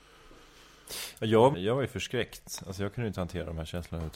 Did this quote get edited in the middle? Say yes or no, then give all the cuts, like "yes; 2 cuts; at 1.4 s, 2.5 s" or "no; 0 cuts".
yes; 1 cut; at 1.5 s